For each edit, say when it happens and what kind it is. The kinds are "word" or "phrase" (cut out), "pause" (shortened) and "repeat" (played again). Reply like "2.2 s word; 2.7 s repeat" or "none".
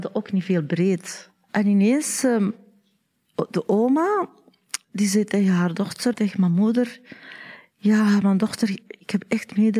6.1 s word